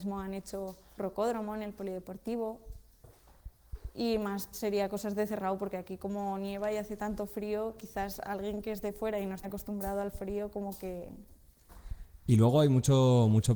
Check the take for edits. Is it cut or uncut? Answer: cut